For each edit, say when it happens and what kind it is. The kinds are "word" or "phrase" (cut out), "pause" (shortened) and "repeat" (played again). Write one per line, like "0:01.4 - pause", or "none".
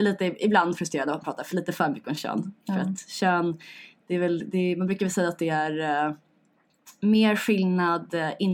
none